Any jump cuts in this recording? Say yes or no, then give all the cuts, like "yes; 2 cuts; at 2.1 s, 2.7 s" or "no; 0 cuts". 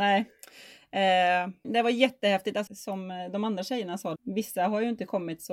yes; 3 cuts; at 1.6 s, 2.7 s, 4.2 s